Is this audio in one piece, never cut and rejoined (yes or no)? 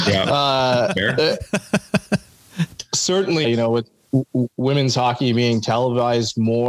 no